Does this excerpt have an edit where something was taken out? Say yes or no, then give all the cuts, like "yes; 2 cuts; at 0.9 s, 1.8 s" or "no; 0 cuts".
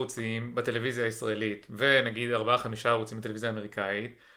no; 0 cuts